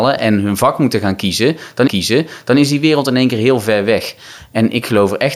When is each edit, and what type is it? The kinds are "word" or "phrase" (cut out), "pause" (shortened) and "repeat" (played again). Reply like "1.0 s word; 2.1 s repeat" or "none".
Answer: 1.9 s repeat